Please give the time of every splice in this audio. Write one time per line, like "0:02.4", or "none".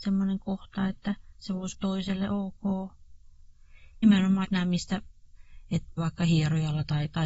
0:01.7
0:04.0
0:04.4
0:06.0